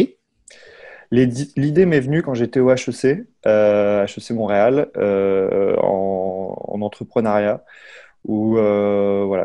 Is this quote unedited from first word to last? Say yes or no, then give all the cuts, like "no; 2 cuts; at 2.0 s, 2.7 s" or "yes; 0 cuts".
yes; 0 cuts